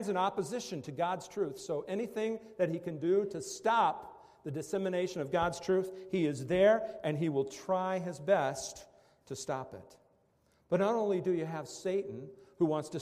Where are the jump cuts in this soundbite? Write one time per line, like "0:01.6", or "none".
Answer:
none

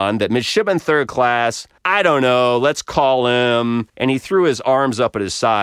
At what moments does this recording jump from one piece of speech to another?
0:01.8
0:03.9

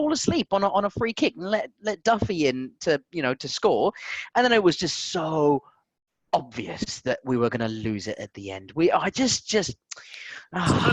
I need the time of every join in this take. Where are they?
none

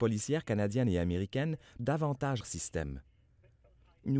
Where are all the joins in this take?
0:01.8
0:02.4

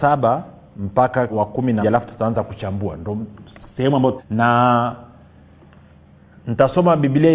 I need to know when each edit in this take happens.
0:01.3
0:01.8
0:04.2

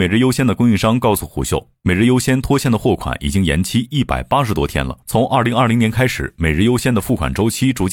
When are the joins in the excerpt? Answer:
0:05.0

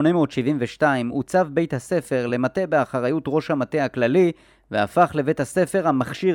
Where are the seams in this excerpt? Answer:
none

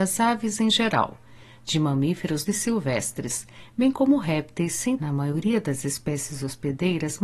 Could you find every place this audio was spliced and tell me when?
0:02.5
0:05.0

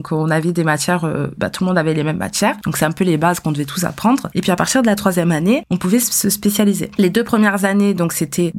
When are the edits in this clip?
none

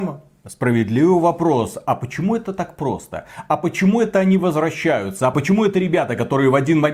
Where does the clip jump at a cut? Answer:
none

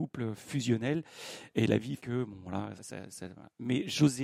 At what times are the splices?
0:02.0
0:02.8

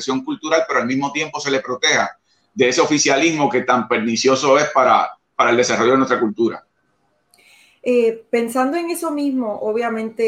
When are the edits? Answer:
none

